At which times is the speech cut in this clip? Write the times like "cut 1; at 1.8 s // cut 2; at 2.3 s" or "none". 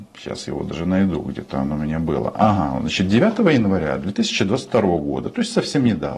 none